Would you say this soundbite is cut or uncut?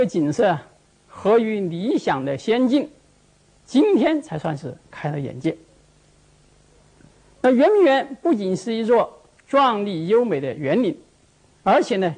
uncut